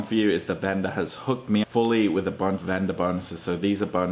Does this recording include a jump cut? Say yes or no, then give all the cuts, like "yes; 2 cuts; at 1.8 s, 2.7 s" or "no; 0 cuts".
yes; 2 cuts; at 1.6 s, 2.6 s